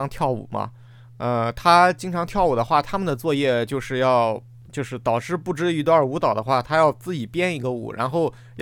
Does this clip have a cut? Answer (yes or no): no